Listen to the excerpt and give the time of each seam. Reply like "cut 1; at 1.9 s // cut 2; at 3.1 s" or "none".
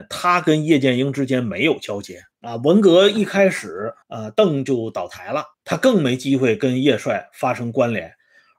cut 1; at 2.3 s // cut 2; at 4.0 s // cut 3; at 5.5 s